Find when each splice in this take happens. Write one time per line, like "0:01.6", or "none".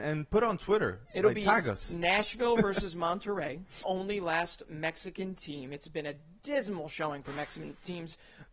0:03.8